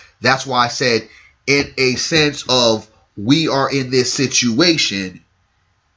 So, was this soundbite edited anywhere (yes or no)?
no